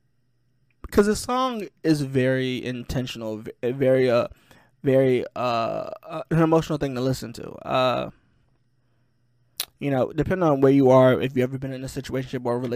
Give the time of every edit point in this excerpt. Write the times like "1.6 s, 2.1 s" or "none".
none